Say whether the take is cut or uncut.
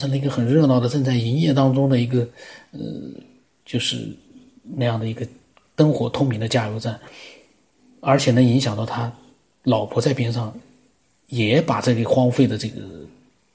uncut